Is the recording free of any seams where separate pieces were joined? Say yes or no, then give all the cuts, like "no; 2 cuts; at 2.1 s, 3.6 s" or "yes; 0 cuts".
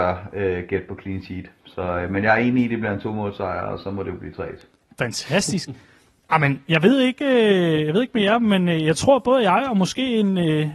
yes; 0 cuts